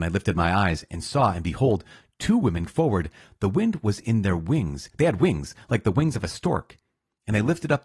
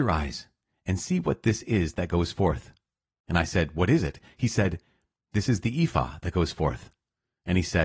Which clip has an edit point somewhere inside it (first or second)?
first